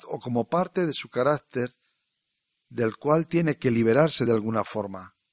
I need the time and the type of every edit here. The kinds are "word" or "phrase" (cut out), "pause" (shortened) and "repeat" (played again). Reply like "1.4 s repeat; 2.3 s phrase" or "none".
none